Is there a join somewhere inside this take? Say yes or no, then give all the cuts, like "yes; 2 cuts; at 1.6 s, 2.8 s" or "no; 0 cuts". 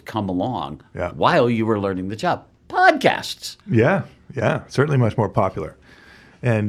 yes; 1 cut; at 3.6 s